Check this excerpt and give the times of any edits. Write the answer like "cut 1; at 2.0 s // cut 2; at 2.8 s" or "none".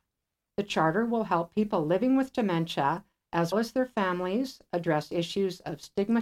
cut 1; at 3.5 s